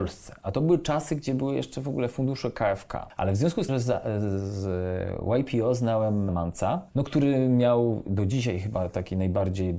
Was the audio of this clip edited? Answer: yes; 2 cuts; at 3.7 s, 6.3 s

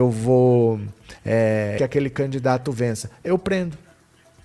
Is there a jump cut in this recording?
yes; 1 cut; at 1.8 s

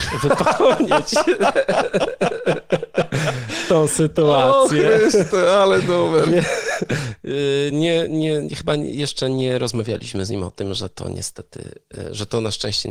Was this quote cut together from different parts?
no; 0 cuts

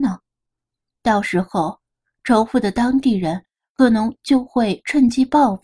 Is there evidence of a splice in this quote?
no; 0 cuts

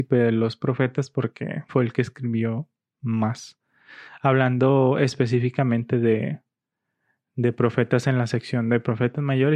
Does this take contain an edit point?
yes; 1 cut; at 1.7 s

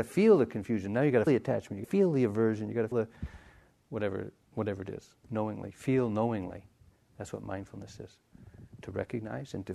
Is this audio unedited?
no; 5 cuts; at 1.3 s, 1.8 s, 2.9 s, 4.4 s, 5.2 s

